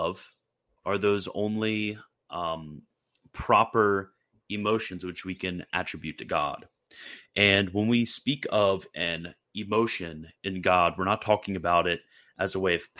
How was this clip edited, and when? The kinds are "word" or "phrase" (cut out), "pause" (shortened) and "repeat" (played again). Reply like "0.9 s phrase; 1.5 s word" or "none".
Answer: none

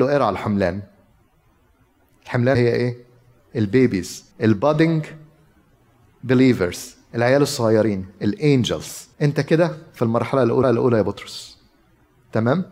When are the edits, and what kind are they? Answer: 2.5 s word; 4.3 s pause; 9.1 s pause; 10.6 s repeat

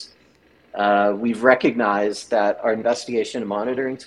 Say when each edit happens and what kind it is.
none

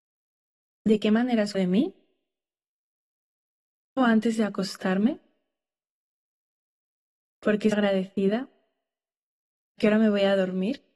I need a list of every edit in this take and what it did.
1.5 s word; 4.0 s word; 7.7 s word; 9.8 s word

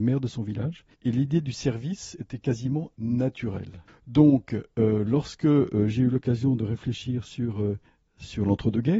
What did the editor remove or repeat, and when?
0.9 s pause; 3.9 s pause; 7.9 s pause

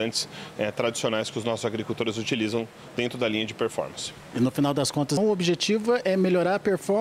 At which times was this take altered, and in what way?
5.2 s word

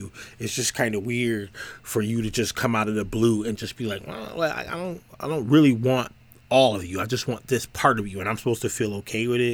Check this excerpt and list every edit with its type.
none

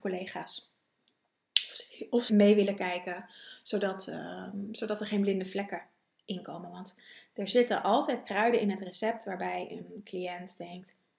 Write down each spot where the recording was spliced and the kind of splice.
2.3 s word

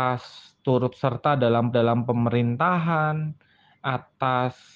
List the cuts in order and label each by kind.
1.7 s repeat

